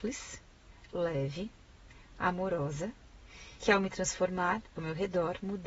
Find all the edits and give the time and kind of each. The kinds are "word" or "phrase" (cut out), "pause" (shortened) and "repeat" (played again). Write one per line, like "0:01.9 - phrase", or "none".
0:03.6 - word
0:04.7 - word